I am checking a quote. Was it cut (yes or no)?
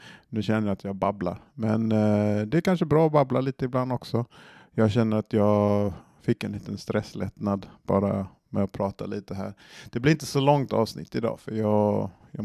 no